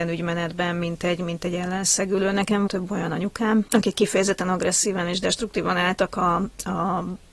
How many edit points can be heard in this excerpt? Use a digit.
1